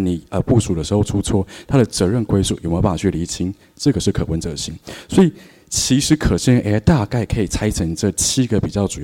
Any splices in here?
no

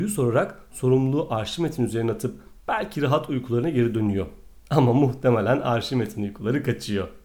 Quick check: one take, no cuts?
yes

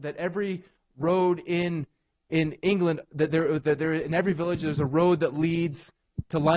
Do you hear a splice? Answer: no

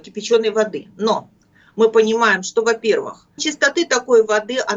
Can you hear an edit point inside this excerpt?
yes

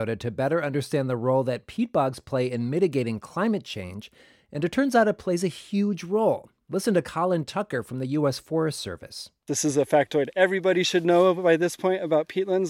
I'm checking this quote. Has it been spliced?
no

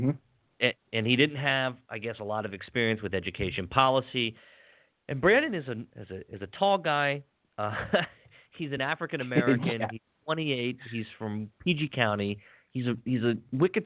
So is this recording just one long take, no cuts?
yes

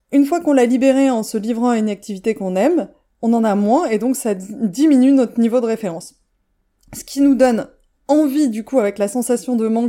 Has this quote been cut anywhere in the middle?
no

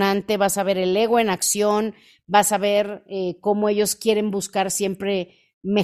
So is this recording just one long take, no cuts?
yes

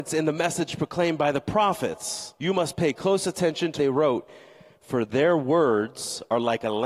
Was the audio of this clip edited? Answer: yes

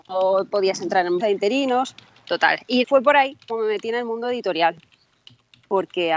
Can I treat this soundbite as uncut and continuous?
no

